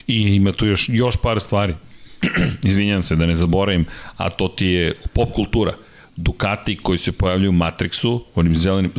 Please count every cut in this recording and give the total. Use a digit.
0